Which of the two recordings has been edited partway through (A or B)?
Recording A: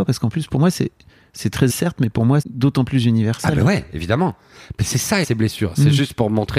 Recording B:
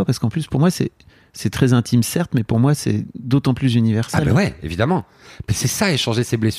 A